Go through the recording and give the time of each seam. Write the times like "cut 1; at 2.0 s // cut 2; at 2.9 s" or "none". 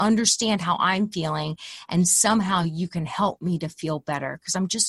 none